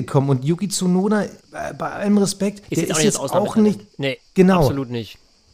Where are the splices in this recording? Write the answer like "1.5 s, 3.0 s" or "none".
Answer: 1.4 s, 2.6 s, 3.9 s